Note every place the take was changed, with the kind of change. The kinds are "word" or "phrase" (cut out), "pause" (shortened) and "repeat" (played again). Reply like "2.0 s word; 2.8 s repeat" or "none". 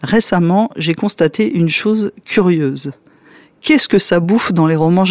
none